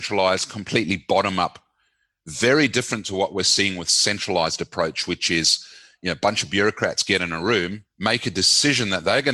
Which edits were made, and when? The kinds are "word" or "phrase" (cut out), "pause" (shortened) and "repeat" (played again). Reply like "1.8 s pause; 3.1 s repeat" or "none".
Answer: none

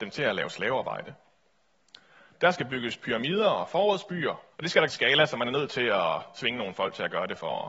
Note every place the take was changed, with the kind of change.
4.5 s pause; 4.9 s phrase

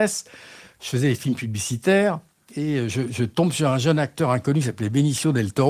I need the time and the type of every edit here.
none

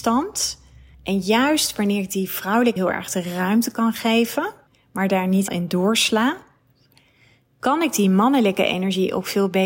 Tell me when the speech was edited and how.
0.9 s pause; 2.8 s word; 4.7 s pause; 5.5 s word

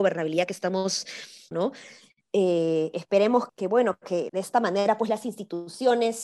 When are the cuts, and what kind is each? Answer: 1.5 s word; 3.5 s word; 4.3 s word

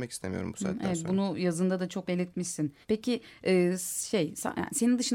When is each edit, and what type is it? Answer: 2.1 s word; 2.8 s pause

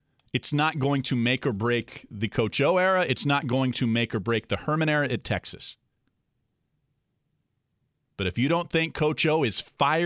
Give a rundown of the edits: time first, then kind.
none

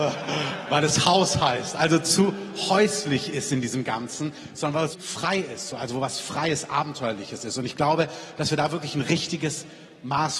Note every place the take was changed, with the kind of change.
4.9 s word

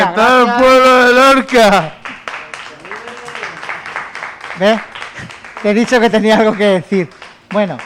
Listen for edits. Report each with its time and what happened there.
none

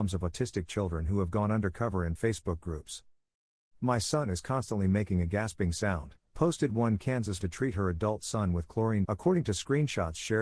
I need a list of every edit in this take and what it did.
2.2 s word; 7.4 s phrase; 9.1 s word

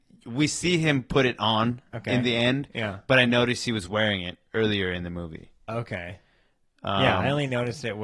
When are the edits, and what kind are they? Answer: none

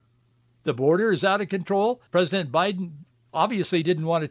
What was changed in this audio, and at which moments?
2.1 s pause

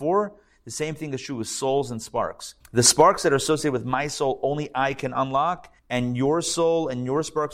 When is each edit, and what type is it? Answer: 2.6 s pause; 5.8 s pause

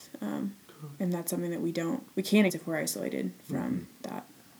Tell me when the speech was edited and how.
2.1 s pause; 2.5 s word

